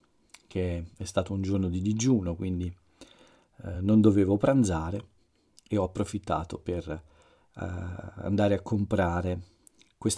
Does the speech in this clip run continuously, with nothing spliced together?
yes; 0 cuts

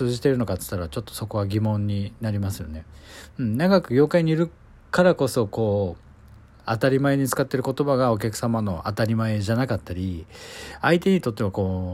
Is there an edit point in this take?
no; 0 cuts

